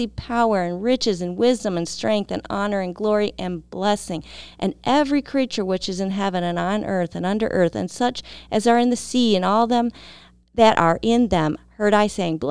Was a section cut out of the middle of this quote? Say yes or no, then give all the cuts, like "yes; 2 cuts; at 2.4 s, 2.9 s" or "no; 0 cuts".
yes; 1 cut; at 10.4 s